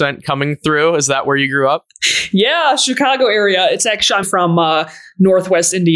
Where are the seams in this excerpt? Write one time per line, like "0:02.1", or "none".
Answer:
0:04.2